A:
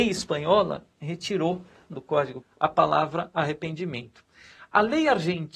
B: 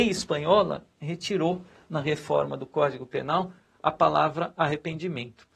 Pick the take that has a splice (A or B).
A